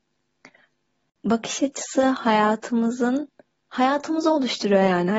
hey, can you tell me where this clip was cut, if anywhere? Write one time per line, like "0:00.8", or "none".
none